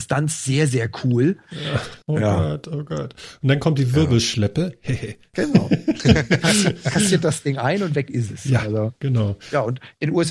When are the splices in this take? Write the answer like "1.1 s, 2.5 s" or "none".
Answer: 2.0 s